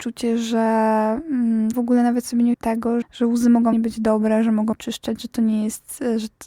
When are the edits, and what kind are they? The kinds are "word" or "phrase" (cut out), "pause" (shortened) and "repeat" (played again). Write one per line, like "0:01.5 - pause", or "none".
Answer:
0:01.7 - word
0:02.5 - word
0:03.0 - word
0:03.7 - word
0:04.7 - word